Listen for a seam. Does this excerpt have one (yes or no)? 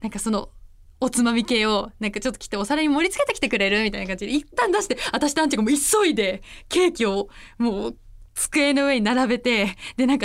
no